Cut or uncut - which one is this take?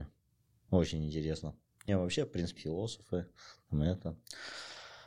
cut